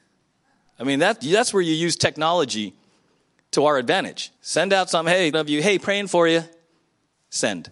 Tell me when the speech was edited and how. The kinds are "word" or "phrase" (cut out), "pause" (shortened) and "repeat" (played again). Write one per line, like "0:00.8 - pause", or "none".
0:04.4 - pause
0:05.3 - word